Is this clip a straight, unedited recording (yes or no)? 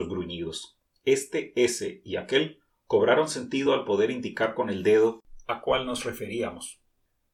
yes